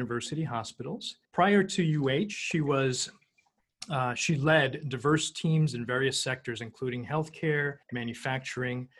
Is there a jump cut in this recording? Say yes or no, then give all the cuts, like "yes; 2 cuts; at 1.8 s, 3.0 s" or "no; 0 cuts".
yes; 2 cuts; at 1.2 s, 7.8 s